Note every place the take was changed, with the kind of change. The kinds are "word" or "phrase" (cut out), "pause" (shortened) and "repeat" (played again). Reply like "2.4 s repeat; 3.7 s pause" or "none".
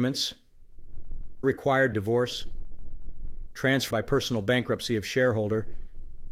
1.4 s word; 1.9 s word; 3.9 s word